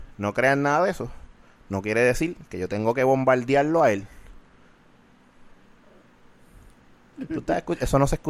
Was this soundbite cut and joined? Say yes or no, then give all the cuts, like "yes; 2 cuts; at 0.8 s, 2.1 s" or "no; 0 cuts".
no; 0 cuts